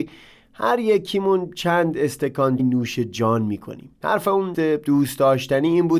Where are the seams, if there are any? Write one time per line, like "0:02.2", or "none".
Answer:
0:02.6
0:03.9
0:04.5